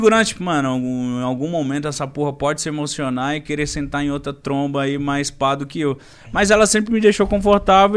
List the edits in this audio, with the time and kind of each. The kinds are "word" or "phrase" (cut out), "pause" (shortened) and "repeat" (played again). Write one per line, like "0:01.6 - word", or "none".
none